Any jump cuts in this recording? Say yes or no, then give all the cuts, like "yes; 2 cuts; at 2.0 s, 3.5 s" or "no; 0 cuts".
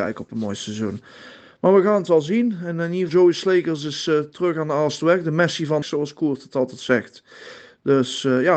yes; 2 cuts; at 3.1 s, 5.8 s